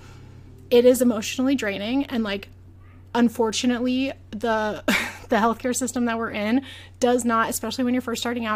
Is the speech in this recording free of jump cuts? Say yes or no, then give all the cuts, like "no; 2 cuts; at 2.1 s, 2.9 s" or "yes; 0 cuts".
yes; 0 cuts